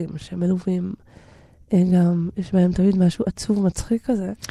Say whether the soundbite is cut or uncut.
uncut